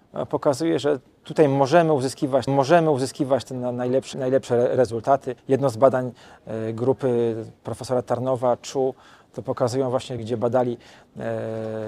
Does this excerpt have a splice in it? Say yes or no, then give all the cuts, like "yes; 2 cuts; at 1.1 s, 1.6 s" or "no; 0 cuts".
yes; 5 cuts; at 2.5 s, 4.1 s, 5.4 s, 7.6 s, 10.2 s